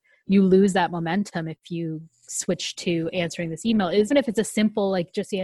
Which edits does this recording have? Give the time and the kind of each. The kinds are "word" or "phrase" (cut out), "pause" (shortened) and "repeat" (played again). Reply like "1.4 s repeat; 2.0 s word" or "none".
4.1 s word